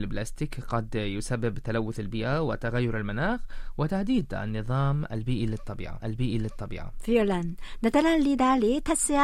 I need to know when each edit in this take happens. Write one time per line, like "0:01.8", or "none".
0:06.0